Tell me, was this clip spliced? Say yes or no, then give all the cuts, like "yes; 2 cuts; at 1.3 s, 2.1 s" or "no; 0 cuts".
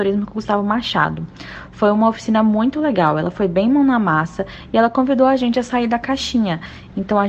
no; 0 cuts